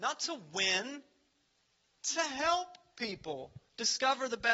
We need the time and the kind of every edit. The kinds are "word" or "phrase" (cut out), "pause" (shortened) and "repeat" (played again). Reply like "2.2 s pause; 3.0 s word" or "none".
none